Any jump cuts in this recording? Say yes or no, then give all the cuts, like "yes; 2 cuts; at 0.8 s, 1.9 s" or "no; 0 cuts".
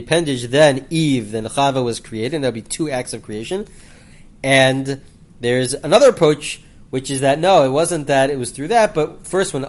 no; 0 cuts